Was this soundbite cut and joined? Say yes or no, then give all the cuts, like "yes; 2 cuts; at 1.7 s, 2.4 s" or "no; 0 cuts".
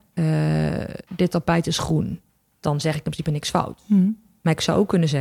yes; 2 cuts; at 1.0 s, 2.3 s